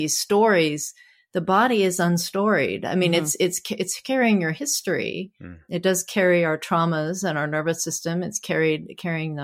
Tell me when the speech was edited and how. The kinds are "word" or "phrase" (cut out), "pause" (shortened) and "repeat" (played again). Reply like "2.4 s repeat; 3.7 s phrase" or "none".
none